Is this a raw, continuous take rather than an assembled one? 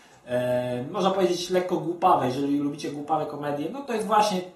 yes; 0 cuts

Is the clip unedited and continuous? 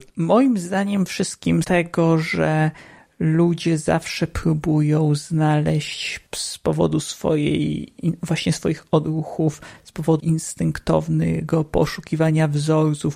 no; 4 cuts; at 1.1 s, 1.6 s, 6.3 s, 10.2 s

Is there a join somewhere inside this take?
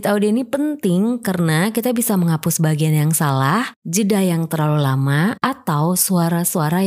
no; 0 cuts

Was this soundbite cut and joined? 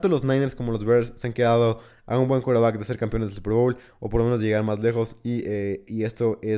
no; 0 cuts

